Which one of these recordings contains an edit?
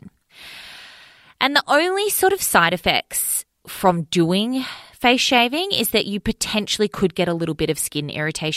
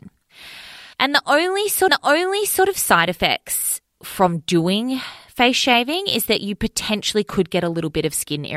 second; 2 cuts; at 0.9 s, 1.9 s

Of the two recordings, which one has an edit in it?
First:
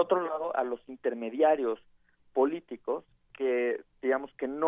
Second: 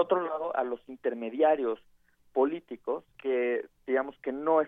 second; 1 cut; at 3.1 s

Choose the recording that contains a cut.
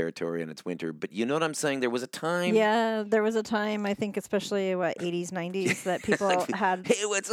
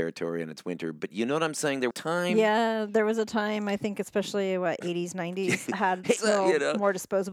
second; 3 cuts; at 1.9 s, 5.7 s, 6.2 s

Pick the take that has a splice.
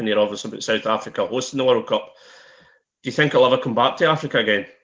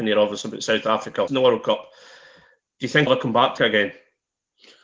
second; 3 cuts; at 1.3 s, 3.1 s, 3.6 s

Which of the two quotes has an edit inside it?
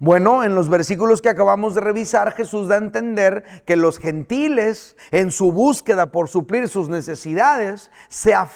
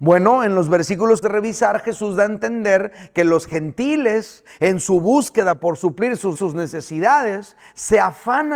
second; 2 cuts; at 1.2 s, 6.3 s

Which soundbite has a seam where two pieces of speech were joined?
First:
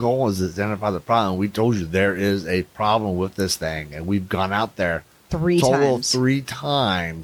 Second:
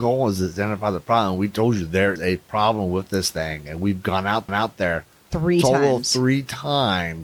second; 2 cuts; at 2.2 s, 4.5 s

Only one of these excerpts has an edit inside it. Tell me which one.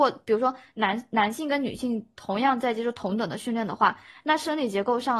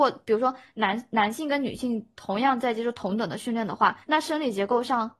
second; 1 cut; at 4.0 s

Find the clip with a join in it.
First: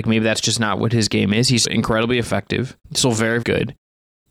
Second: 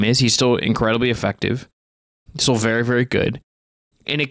first; 3 cuts; at 1.6 s, 2.8 s, 3.4 s

